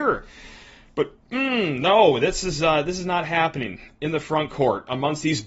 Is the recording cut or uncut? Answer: uncut